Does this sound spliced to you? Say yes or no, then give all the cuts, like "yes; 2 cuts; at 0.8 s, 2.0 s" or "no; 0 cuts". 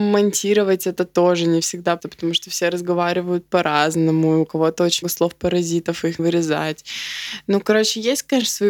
yes; 3 cuts; at 2.0 s, 5.0 s, 6.2 s